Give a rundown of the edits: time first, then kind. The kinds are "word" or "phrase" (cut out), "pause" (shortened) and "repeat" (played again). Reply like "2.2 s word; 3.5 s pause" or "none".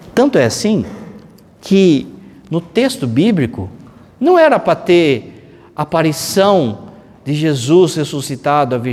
none